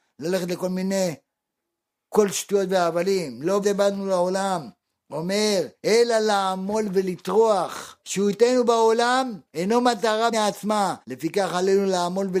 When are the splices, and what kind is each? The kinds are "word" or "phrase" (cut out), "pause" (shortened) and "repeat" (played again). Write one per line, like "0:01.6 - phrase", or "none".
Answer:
0:03.6 - word
0:05.8 - pause
0:08.0 - pause
0:09.5 - pause
0:10.3 - word
0:11.0 - pause